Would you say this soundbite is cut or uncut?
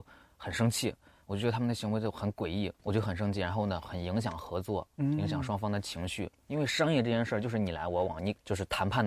uncut